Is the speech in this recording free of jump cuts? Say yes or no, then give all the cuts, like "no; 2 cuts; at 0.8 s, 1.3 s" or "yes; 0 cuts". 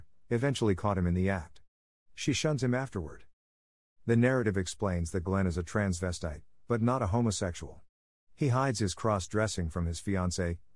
yes; 0 cuts